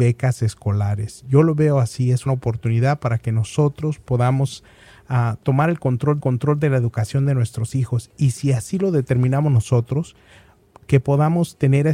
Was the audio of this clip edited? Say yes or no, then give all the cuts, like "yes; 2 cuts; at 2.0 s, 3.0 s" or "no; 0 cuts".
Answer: yes; 2 cuts; at 2.3 s, 6.2 s